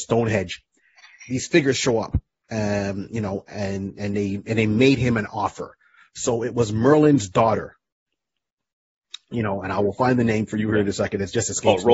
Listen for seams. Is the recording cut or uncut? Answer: uncut